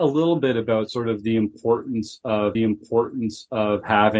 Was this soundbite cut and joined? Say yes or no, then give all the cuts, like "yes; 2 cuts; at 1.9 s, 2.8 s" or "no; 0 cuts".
yes; 1 cut; at 2.5 s